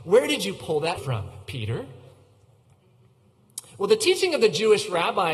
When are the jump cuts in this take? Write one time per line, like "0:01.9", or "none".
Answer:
0:01.0